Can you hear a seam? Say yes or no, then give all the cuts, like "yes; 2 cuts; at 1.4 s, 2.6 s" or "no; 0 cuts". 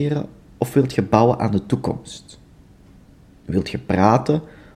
no; 0 cuts